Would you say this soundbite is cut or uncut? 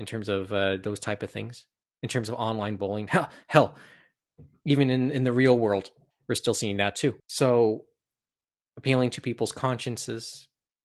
cut